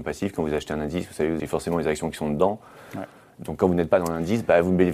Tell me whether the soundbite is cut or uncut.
cut